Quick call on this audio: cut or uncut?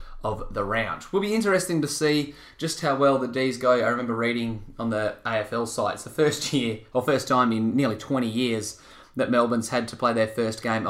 uncut